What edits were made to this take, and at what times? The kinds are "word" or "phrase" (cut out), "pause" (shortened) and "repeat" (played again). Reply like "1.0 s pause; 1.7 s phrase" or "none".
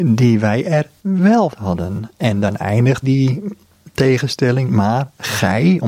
1.5 s word; 3.0 s word; 4.7 s word